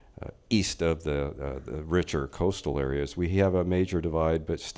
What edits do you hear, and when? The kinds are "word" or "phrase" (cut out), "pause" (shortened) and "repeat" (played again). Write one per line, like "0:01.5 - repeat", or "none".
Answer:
none